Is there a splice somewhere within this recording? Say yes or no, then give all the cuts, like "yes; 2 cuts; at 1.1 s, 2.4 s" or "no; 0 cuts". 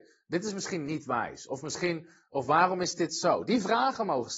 no; 0 cuts